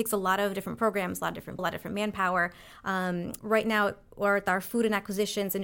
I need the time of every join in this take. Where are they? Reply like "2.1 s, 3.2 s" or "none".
1.6 s, 3.4 s